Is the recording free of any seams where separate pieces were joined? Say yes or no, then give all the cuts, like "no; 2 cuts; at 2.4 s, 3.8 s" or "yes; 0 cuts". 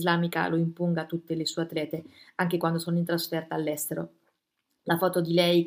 yes; 0 cuts